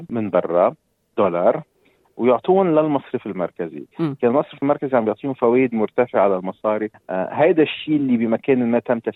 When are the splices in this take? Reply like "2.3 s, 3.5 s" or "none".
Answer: none